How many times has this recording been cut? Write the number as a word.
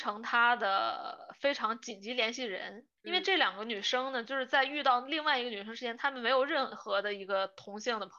one